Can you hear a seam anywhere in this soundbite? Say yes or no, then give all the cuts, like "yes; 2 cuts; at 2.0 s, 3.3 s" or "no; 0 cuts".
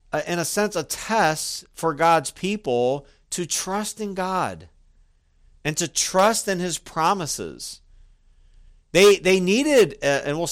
no; 0 cuts